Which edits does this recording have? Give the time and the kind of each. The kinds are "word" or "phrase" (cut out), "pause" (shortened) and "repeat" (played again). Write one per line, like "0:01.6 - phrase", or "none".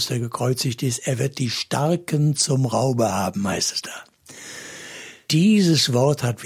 none